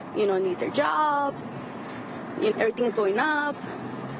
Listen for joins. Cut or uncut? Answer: cut